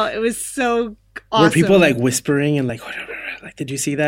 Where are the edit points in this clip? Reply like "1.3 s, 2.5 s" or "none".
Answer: none